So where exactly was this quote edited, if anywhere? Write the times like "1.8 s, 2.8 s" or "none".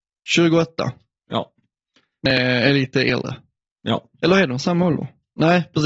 none